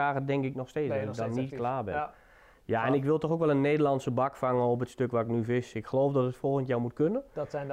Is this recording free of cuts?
yes; 0 cuts

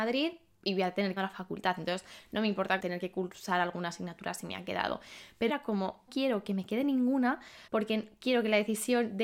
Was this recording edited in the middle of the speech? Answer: yes; 5 cuts; at 1.2 s, 2.8 s, 5.5 s, 6.1 s, 7.7 s

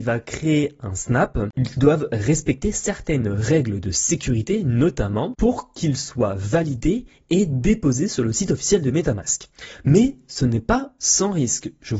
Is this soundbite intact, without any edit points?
yes; 0 cuts

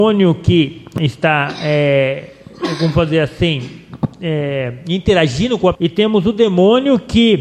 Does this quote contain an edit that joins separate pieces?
yes; 2 cuts; at 4.1 s, 5.7 s

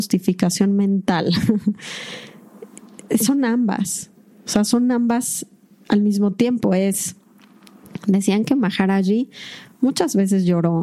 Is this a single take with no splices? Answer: yes; 0 cuts

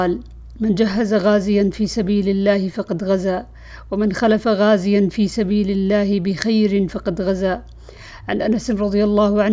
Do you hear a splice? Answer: no; 0 cuts

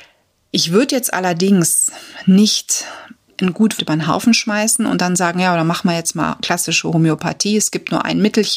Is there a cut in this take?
yes; 2 cuts; at 3.3 s, 3.8 s

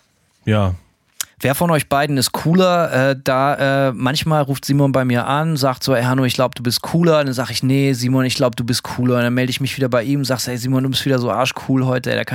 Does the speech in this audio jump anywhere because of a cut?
yes; 1 cut; at 1.3 s

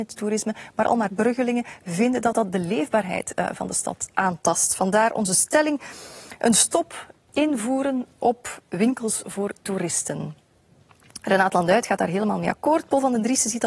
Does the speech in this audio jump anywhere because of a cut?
yes; 1 cut; at 1.1 s

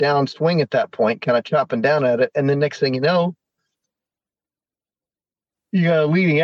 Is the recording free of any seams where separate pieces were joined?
yes; 0 cuts

